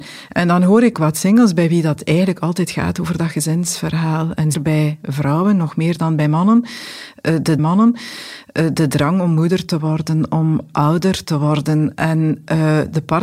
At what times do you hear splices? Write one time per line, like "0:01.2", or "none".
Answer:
0:00.9
0:04.5
0:07.6